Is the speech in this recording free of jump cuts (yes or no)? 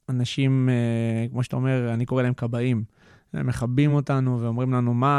yes